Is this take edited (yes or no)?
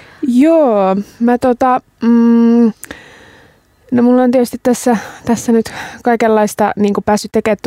no